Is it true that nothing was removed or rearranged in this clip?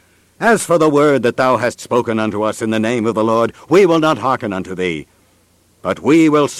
yes; 0 cuts

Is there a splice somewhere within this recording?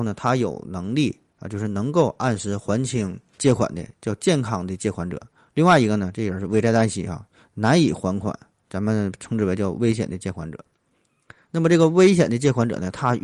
yes; 1 cut; at 3.4 s

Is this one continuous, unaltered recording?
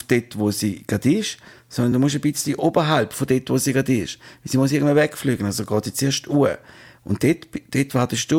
yes; 0 cuts

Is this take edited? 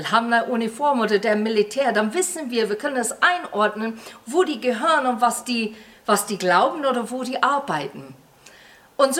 no; 0 cuts

